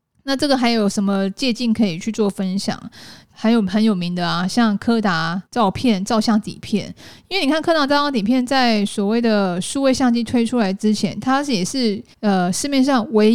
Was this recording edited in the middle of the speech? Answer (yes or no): yes